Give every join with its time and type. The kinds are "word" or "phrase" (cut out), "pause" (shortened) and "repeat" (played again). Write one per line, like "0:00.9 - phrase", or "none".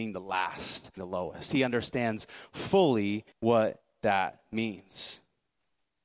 0:01.0 - word
0:03.3 - pause